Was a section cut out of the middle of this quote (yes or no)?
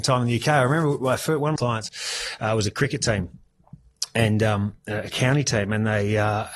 yes